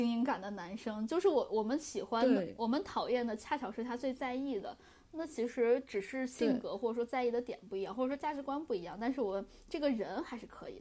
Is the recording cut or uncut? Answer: uncut